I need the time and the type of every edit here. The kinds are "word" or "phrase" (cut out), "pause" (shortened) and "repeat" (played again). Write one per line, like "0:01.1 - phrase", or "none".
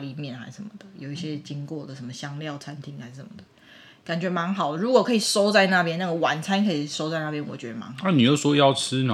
none